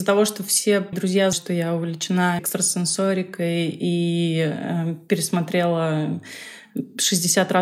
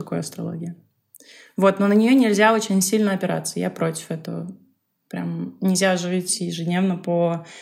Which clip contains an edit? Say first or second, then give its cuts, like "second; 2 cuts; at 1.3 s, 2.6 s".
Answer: first; 3 cuts; at 0.9 s, 1.3 s, 2.4 s